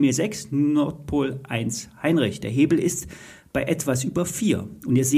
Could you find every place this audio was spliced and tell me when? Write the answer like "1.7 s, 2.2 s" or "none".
none